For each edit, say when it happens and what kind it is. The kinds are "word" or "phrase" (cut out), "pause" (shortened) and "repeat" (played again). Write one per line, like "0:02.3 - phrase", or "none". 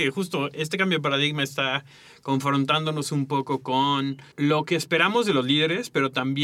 0:04.3 - pause